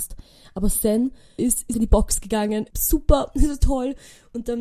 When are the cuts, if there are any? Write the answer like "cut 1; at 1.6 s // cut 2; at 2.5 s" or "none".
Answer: cut 1; at 1.4 s // cut 2; at 1.7 s // cut 3; at 2.7 s